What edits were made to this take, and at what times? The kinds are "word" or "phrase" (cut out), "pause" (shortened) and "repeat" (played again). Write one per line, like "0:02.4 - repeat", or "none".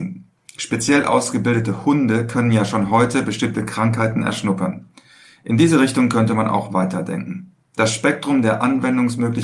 none